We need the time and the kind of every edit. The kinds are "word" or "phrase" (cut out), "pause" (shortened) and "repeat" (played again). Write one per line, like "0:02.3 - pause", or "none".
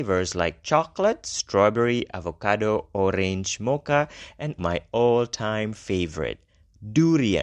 0:04.6 - word